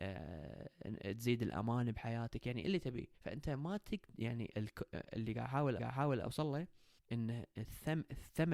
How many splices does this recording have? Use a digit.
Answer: 4